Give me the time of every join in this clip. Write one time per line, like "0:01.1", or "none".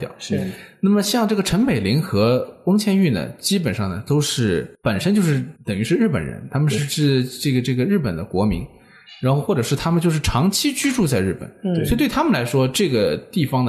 0:04.7
0:05.6

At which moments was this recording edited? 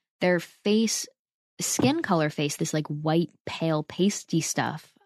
0:02.6

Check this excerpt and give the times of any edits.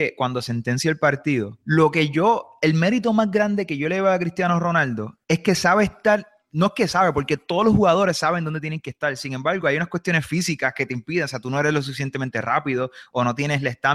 0:01.6
0:05.2

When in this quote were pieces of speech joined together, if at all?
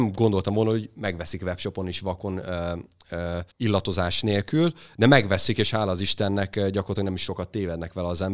0:03.5

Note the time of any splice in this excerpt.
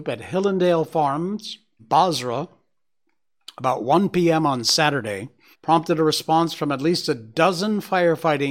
0:01.8
0:05.5

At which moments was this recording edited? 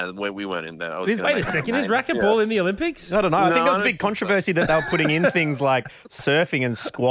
none

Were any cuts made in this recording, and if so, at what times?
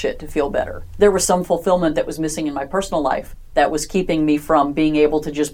none

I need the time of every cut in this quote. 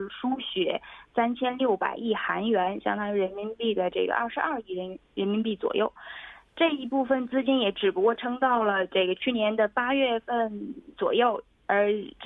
0:10.9

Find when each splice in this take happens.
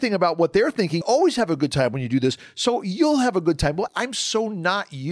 0:01.0
0:03.9

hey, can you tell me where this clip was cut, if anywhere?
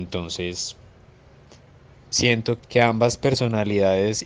0:02.6

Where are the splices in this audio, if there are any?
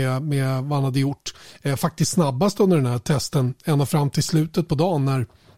none

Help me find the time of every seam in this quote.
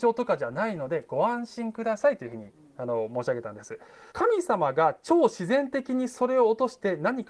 0:04.1

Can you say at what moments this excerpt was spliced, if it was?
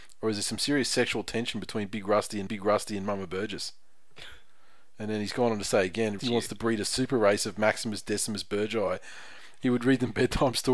0:02.5
0:06.2

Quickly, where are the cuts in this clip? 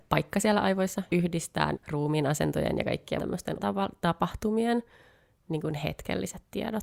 0:01.1
0:01.7
0:03.2
0:03.6

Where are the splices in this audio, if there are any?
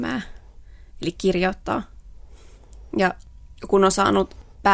0:01.1

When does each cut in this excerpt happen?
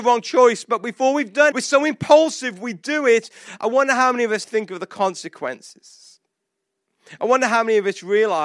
0:01.5
0:04.4

